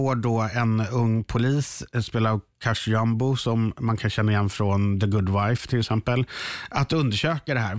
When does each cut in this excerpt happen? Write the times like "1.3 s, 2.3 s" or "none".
none